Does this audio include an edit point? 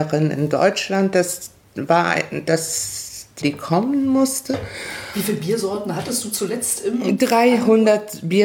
yes; 1 cut; at 3.4 s

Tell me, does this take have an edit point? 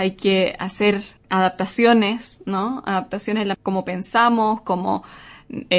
yes; 2 cuts; at 1.2 s, 3.5 s

